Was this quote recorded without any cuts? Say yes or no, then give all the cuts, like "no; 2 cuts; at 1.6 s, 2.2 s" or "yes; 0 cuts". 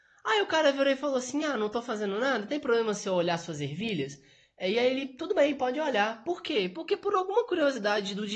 yes; 0 cuts